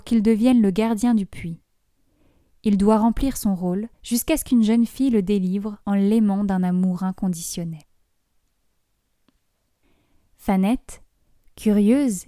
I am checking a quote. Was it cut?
yes; 2 cuts; at 3.9 s, 5.8 s

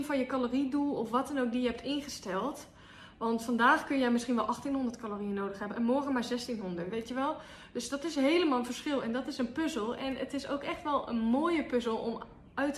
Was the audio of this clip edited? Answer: no; 0 cuts

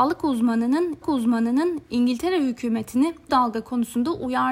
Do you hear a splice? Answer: yes; 2 cuts; at 1.0 s, 3.3 s

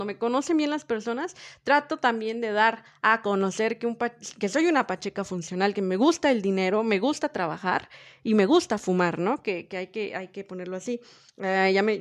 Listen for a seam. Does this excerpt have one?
no; 0 cuts

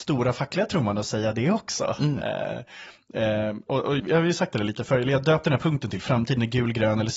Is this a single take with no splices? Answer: no; 1 cut; at 4.0 s

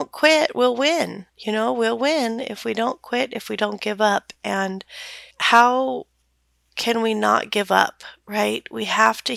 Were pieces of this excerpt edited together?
yes; 2 cuts; at 1.3 s, 5.3 s

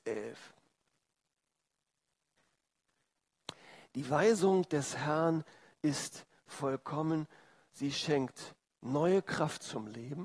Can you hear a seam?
no; 0 cuts

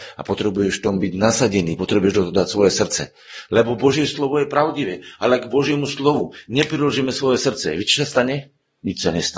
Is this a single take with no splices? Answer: yes; 0 cuts

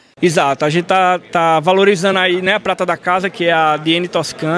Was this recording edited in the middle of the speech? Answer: no; 0 cuts

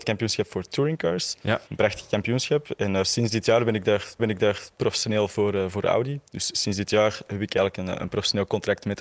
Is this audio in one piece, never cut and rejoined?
no; 2 cuts; at 1.7 s, 4.2 s

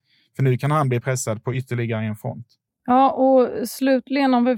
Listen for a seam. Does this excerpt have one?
no; 0 cuts

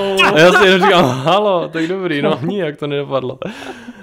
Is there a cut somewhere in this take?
no; 0 cuts

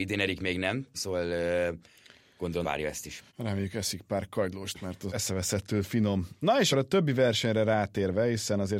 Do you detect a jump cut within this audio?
yes; 6 cuts; at 0.9 s, 2.6 s, 3.3 s, 4.7 s, 5.1 s, 6.7 s

